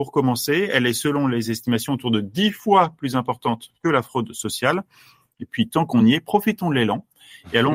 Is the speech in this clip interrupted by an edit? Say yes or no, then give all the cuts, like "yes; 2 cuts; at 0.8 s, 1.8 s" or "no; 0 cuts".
no; 0 cuts